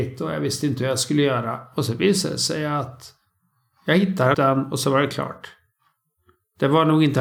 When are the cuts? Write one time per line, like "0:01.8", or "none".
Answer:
0:04.3